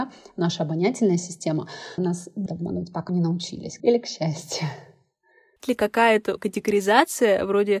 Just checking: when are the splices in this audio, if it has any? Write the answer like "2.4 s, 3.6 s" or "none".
2.0 s, 2.5 s, 3.1 s, 3.8 s, 5.6 s, 6.4 s